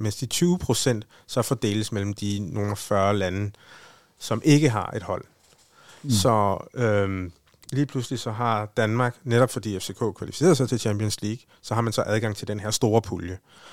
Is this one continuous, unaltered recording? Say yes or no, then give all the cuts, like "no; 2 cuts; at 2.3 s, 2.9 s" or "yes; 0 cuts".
yes; 0 cuts